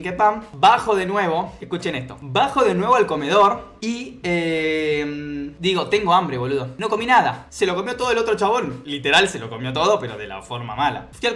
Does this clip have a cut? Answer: no; 0 cuts

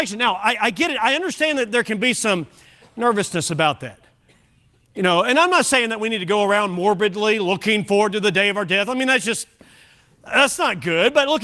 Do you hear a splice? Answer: no; 0 cuts

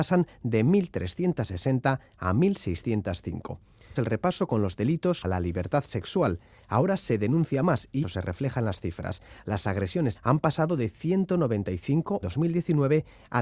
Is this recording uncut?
no; 5 cuts; at 4.0 s, 5.2 s, 8.0 s, 10.1 s, 12.2 s

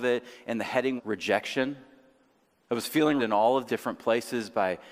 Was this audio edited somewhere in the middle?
yes; 3 cuts; at 1.0 s, 3.2 s, 3.7 s

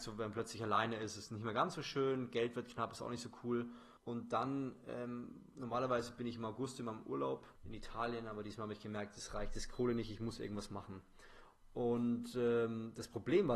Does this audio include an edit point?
yes; 2 cuts; at 4.0 s, 7.6 s

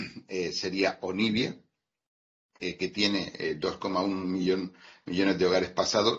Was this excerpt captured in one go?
yes; 0 cuts

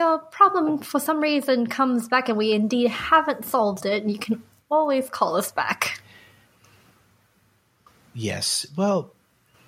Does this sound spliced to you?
no; 0 cuts

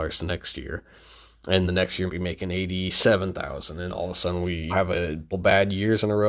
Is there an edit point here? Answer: yes; 5 cuts; at 1.6 s, 2.1 s, 3.9 s, 4.7 s, 5.3 s

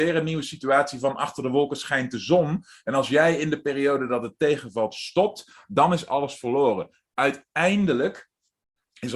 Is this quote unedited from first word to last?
yes; 0 cuts

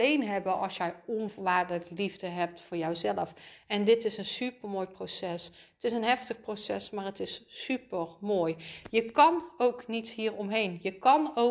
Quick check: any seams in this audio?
no; 0 cuts

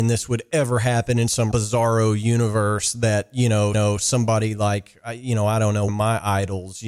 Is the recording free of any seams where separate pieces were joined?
no; 3 cuts; at 1.5 s, 3.7 s, 5.9 s

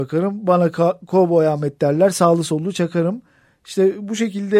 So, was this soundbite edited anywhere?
no; 0 cuts

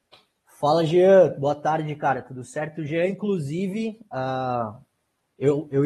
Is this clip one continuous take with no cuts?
yes; 0 cuts

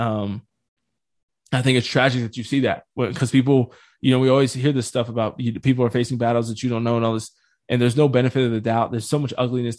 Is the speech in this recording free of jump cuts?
yes; 0 cuts

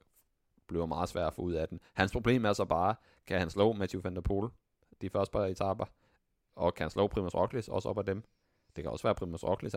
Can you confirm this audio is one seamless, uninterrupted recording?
yes; 0 cuts

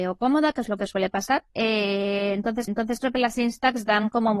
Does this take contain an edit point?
yes; 2 cuts; at 1.5 s, 2.7 s

